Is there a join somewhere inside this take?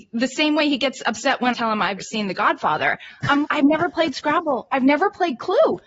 yes; 3 cuts; at 1.5 s, 2.0 s, 3.4 s

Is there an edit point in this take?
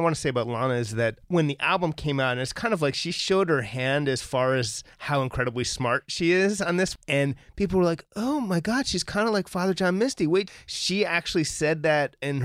yes; 1 cut; at 4.9 s

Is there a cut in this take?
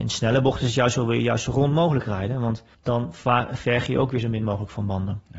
yes; 1 cut; at 2.7 s

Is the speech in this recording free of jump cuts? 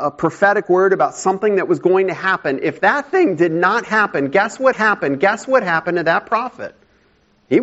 no; 1 cut; at 4.7 s

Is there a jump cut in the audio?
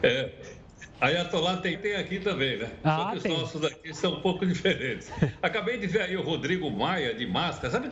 yes; 1 cut; at 1.7 s

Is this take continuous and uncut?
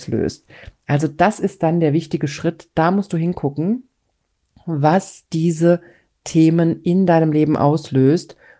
yes; 0 cuts

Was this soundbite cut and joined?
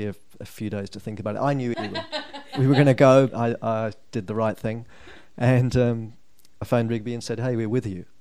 yes; 3 cuts; at 1.7 s, 3.3 s, 6.6 s

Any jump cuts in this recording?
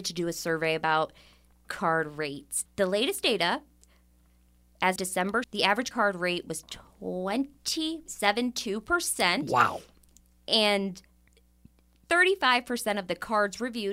yes; 6 cuts; at 1.6 s, 2.7 s, 5.0 s, 5.4 s, 5.9 s, 8.1 s

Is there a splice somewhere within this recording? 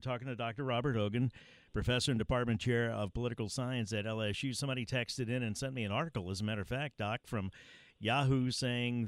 no; 0 cuts

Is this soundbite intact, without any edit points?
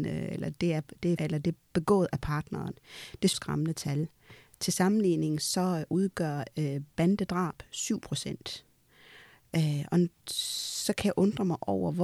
no; 2 cuts; at 1.2 s, 3.3 s

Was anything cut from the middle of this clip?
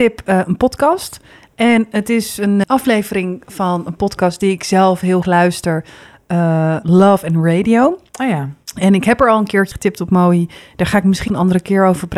yes; 5 cuts; at 2.6 s, 5.2 s, 6.8 s, 9.7 s, 11.3 s

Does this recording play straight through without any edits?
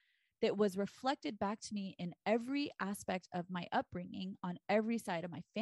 yes; 0 cuts

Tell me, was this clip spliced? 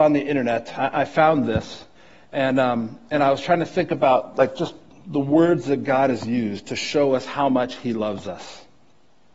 no; 0 cuts

